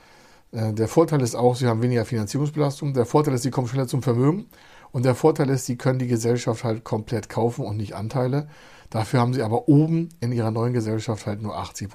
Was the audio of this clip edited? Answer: no; 0 cuts

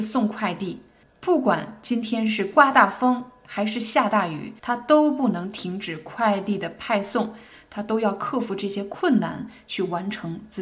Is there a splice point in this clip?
yes; 1 cut; at 4.6 s

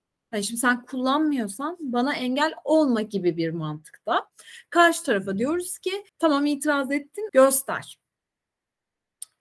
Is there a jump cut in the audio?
yes; 2 cuts; at 6.1 s, 7.3 s

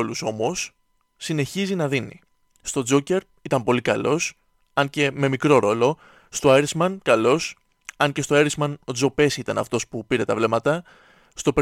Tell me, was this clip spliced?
no; 0 cuts

